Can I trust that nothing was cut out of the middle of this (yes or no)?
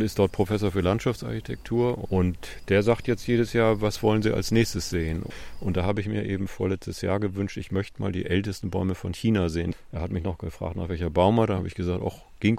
yes